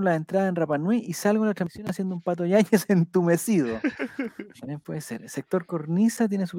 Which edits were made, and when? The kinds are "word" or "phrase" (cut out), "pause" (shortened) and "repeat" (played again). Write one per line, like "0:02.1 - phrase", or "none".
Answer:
none